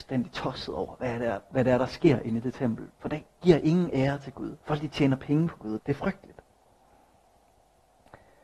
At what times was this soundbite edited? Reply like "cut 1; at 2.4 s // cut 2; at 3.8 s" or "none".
cut 1; at 4.6 s // cut 2; at 5.8 s